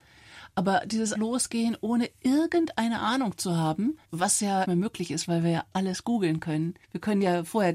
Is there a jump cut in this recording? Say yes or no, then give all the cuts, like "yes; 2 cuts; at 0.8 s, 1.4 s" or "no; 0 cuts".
yes; 5 cuts; at 1.1 s, 4.0 s, 4.6 s, 5.7 s, 6.8 s